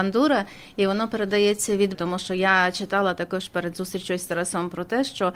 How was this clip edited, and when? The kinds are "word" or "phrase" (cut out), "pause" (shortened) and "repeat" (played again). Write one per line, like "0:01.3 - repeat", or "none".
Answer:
0:01.9 - word